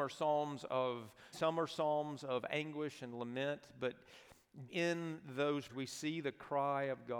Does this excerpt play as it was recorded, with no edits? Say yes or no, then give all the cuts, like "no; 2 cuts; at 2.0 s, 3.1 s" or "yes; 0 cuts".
no; 3 cuts; at 1.3 s, 4.7 s, 5.7 s